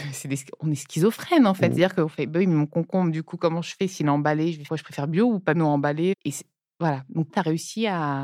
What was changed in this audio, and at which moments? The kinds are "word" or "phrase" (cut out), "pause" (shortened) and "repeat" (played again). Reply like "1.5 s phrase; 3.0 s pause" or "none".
4.7 s word; 5.5 s word; 6.1 s word; 7.3 s word

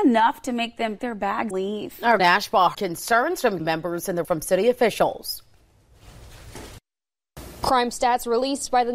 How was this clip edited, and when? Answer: 1.0 s word; 1.5 s word; 2.2 s word; 2.7 s word; 3.6 s word; 4.2 s word

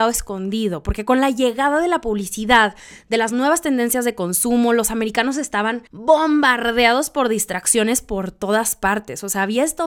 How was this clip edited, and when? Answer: 5.9 s pause

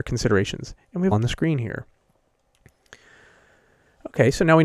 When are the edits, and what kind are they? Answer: 1.1 s phrase

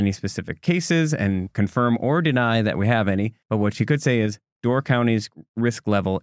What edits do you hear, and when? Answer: 3.4 s pause

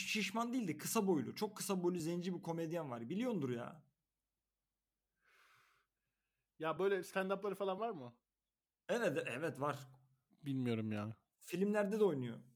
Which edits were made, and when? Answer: none

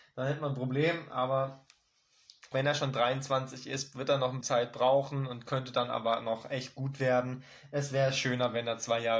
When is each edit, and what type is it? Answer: 2.5 s word; 4.4 s word

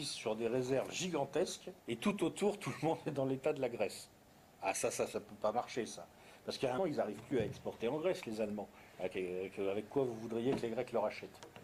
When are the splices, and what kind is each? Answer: 1.8 s pause; 4.3 s pause; 6.8 s phrase; 8.9 s pause

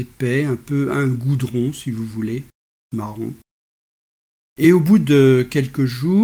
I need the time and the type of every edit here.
none

